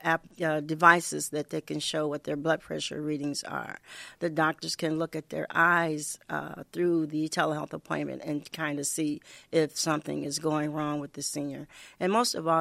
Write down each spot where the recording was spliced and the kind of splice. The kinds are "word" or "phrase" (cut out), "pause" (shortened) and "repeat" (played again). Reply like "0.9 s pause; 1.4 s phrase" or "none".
none